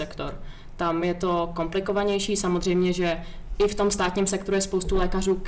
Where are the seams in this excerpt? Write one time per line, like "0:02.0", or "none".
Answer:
none